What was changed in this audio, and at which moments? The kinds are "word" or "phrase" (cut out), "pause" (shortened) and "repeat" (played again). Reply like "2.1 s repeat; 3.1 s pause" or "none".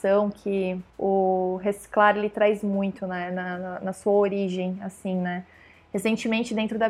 0.9 s pause